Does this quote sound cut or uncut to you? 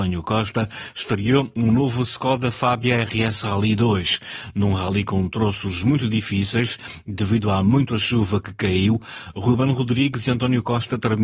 uncut